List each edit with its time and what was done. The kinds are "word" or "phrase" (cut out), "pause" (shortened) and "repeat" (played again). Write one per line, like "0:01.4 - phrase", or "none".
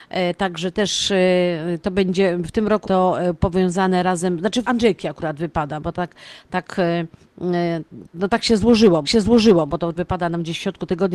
0:02.8 - word
0:04.6 - word
0:08.1 - word
0:09.0 - repeat
0:10.0 - phrase